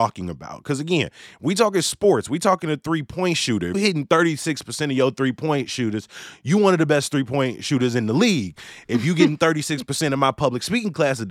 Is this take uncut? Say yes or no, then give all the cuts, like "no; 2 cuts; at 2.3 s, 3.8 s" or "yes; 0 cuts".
no; 1 cut; at 3.7 s